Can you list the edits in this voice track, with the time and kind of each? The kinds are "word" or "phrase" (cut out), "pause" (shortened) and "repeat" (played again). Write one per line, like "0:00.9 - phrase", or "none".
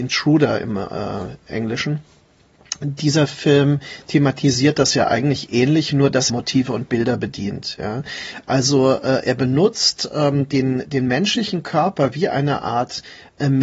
0:06.3 - phrase